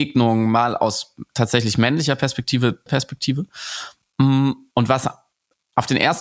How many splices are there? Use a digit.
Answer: 1